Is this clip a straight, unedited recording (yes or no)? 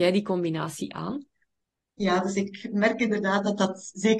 yes